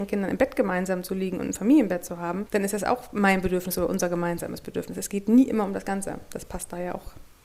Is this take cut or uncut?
uncut